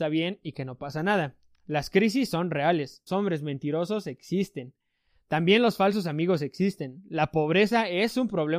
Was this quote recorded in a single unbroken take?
no; 1 cut; at 3.1 s

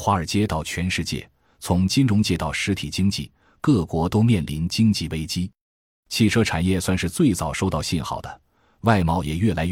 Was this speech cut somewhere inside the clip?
no; 0 cuts

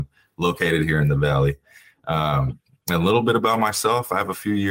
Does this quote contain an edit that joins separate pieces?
no; 0 cuts

